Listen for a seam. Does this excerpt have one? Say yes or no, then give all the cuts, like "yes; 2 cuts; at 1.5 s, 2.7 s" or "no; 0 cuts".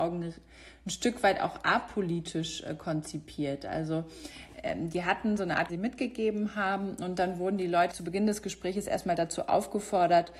yes; 2 cuts; at 5.7 s, 7.9 s